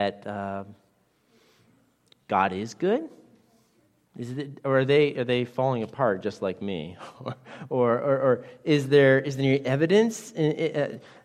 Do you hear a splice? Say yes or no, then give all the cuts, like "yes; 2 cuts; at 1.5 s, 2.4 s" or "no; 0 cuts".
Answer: no; 0 cuts